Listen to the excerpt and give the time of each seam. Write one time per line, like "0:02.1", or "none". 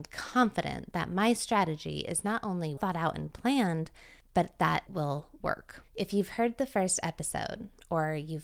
0:02.8
0:04.2
0:04.9
0:05.9